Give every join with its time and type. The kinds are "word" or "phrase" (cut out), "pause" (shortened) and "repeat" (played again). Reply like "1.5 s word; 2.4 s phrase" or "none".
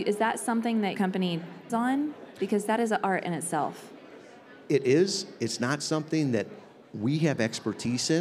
0.9 s word; 1.7 s word